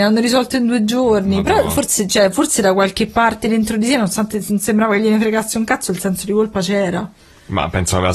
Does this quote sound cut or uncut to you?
uncut